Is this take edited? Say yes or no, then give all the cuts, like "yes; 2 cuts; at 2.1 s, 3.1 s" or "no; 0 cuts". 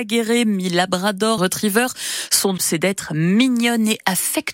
yes; 2 cuts; at 1.4 s, 2.6 s